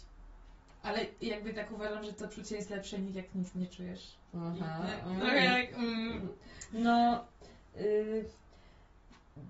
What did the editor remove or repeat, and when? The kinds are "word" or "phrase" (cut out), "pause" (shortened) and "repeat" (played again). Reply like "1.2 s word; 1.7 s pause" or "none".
4.3 s pause

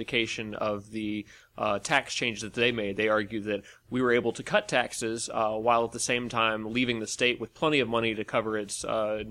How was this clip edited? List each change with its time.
none

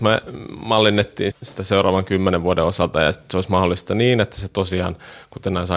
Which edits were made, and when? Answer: 1.3 s word

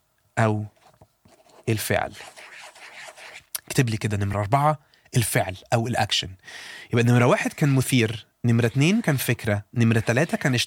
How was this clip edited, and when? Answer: none

